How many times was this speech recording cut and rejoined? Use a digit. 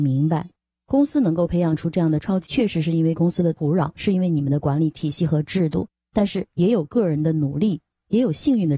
1